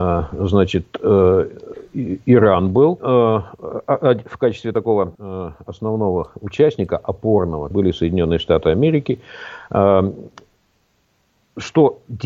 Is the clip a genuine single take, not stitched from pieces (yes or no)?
no